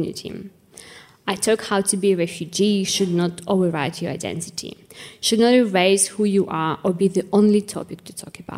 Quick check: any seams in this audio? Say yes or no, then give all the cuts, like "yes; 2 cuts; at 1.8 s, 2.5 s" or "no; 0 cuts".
no; 0 cuts